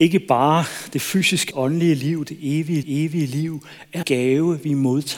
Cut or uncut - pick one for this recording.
cut